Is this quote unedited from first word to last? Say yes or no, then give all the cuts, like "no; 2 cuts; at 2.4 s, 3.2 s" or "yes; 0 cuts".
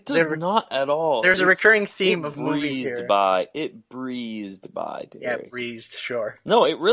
yes; 0 cuts